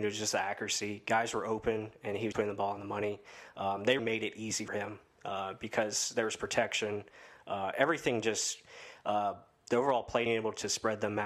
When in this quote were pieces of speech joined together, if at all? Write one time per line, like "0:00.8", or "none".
0:02.3
0:04.0
0:04.7
0:10.3